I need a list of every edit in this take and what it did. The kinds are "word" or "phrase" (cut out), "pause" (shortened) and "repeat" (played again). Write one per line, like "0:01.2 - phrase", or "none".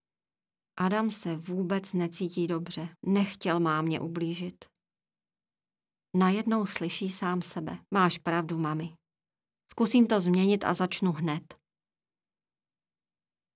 0:03.0 - pause
0:07.9 - pause